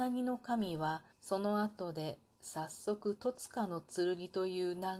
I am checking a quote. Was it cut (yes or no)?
yes